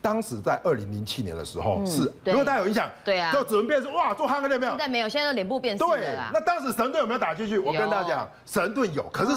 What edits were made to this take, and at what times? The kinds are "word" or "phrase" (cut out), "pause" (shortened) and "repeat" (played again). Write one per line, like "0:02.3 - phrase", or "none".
0:02.2 - phrase